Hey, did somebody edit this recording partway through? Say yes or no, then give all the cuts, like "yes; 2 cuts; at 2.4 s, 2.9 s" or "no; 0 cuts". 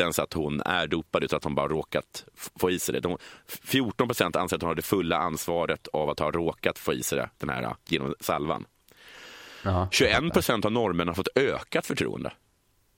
no; 0 cuts